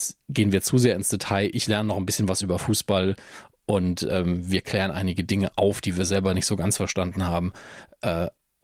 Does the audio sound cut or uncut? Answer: uncut